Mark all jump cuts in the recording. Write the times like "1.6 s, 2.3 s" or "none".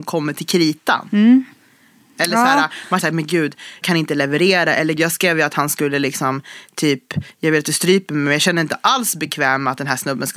3.0 s, 3.8 s, 5.0 s